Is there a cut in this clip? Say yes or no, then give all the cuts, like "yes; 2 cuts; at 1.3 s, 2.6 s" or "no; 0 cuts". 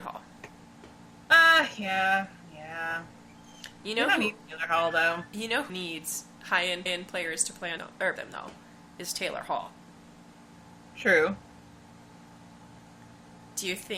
yes; 4 cuts; at 5.7 s, 6.9 s, 7.8 s, 8.2 s